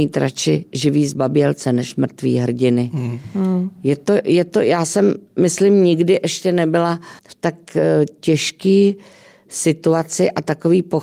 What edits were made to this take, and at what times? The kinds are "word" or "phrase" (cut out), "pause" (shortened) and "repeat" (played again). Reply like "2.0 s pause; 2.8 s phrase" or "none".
7.2 s pause